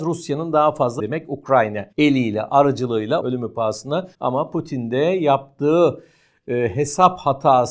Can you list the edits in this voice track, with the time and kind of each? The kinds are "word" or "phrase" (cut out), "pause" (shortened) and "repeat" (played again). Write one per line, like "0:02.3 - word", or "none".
0:01.0 - word
0:01.9 - pause
0:03.2 - word
0:04.1 - pause